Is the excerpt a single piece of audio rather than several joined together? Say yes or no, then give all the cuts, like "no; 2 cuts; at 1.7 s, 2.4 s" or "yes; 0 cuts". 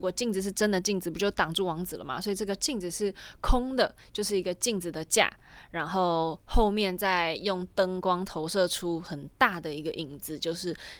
yes; 0 cuts